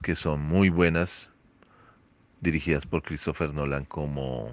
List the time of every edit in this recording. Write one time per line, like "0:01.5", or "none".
none